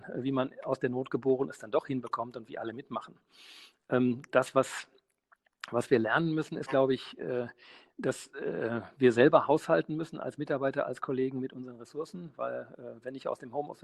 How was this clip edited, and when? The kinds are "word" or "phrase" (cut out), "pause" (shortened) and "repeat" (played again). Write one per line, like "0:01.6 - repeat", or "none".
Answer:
none